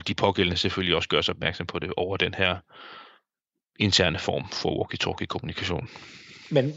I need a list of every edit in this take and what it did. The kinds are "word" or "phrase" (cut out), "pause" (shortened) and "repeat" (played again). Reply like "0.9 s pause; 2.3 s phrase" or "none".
none